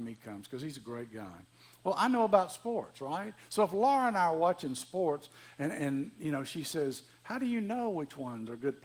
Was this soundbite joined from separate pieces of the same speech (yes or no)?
no